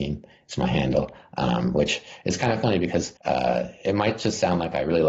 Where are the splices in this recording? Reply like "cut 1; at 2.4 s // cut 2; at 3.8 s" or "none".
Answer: cut 1; at 3.2 s